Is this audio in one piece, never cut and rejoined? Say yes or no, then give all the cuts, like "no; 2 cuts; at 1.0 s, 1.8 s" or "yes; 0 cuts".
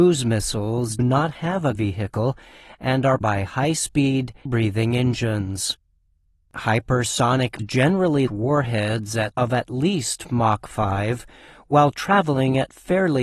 no; 7 cuts; at 1.0 s, 1.7 s, 3.2 s, 4.5 s, 7.6 s, 8.3 s, 9.3 s